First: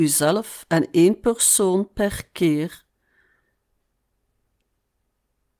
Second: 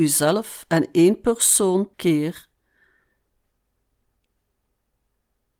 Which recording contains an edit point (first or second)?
second